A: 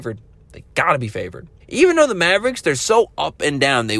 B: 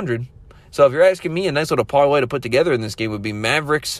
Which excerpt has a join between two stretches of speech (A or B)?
A